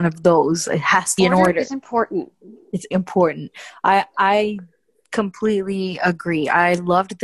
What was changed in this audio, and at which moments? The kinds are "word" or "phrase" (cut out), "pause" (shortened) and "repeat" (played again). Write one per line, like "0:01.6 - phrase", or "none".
0:01.2 - word
0:02.9 - word